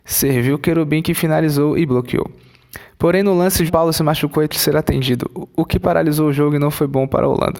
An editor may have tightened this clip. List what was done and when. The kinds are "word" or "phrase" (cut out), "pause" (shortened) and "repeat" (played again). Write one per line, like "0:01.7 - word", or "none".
0:01.9 - word
0:03.7 - word
0:04.5 - word

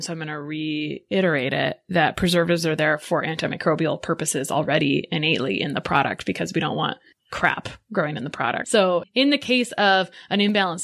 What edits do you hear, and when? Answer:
none

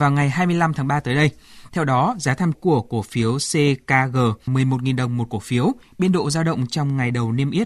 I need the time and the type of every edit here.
0:02.5 - word
0:04.5 - phrase

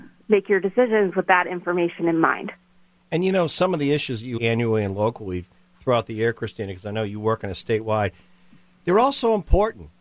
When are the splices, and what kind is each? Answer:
0:04.4 - word

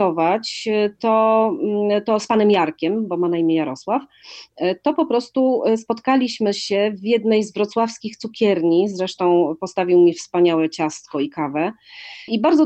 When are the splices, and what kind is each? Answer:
none

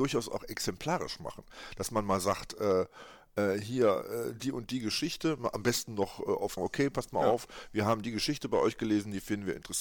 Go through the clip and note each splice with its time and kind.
0:06.6 - phrase

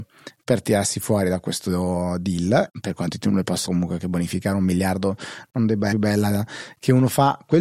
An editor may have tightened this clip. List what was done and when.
0:02.7 - word
0:03.7 - word
0:04.0 - word
0:05.9 - phrase

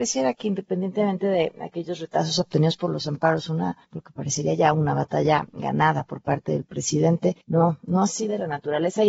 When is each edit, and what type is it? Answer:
0:03.8 - pause
0:07.4 - pause

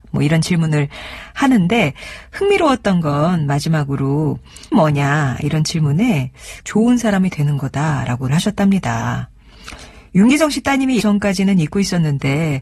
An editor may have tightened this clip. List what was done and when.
0:04.7 - word
0:06.6 - word
0:08.3 - word
0:11.0 - word

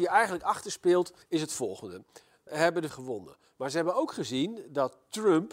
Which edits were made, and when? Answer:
0:01.2 - pause
0:02.5 - word
0:02.9 - word

